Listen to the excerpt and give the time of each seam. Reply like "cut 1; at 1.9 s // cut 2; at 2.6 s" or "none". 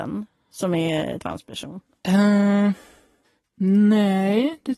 cut 1; at 1.2 s // cut 2; at 3.2 s